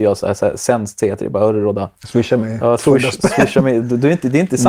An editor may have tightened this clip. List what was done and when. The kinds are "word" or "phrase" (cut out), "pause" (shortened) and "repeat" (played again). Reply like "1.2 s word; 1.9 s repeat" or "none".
2.0 s pause